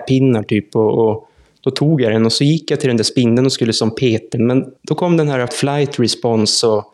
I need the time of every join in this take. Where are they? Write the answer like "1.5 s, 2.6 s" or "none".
4.3 s, 4.8 s, 5.5 s